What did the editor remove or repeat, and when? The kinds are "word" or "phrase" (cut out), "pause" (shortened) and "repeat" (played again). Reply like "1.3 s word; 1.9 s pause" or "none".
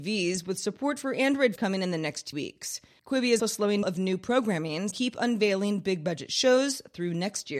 1.6 s word; 2.3 s word; 3.4 s word; 3.8 s phrase; 4.9 s phrase

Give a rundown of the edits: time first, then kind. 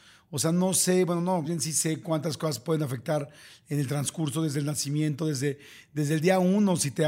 1.4 s word

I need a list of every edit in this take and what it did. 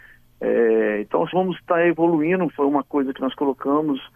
1.3 s word

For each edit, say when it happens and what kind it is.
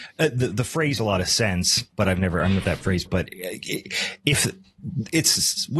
1.0 s word; 1.9 s word; 2.6 s word; 3.1 s word

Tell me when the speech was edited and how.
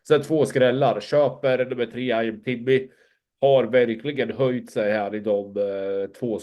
none

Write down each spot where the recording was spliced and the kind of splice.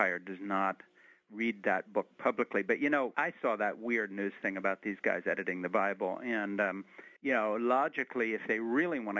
3.1 s word; 7.2 s pause

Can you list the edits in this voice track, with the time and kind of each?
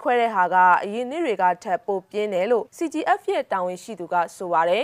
2.7 s pause

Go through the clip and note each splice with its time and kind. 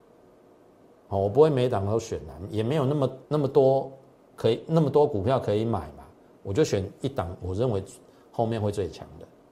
3.3 s pause

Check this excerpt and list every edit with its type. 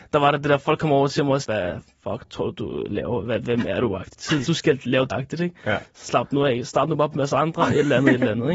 1.4 s word; 4.5 s word; 5.1 s word; 7.1 s word

